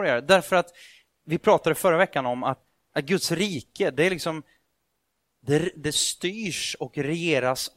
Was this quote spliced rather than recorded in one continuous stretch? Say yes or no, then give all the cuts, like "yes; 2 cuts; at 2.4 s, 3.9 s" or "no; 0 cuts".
no; 0 cuts